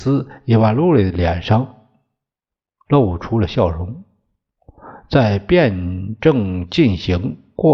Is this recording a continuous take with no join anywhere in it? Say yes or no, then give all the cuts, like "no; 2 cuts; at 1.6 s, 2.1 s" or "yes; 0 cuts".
yes; 0 cuts